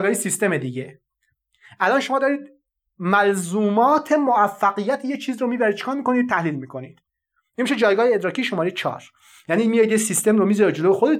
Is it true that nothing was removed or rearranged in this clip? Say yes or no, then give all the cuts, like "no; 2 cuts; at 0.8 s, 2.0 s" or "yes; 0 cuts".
yes; 0 cuts